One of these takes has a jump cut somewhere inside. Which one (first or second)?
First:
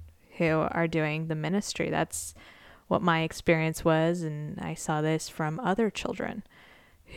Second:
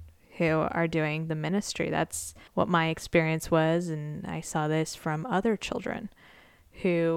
second